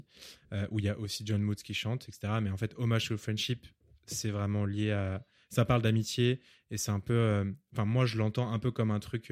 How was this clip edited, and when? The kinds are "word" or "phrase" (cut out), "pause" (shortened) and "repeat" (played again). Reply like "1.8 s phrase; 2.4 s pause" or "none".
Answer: none